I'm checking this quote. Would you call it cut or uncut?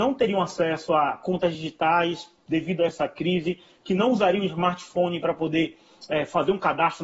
uncut